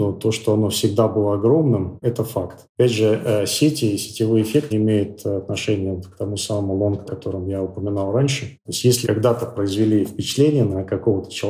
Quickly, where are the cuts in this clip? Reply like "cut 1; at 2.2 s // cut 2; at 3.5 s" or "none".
cut 1; at 4.7 s // cut 2; at 7.1 s // cut 3; at 9.0 s